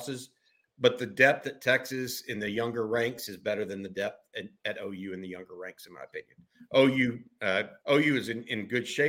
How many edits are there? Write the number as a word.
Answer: one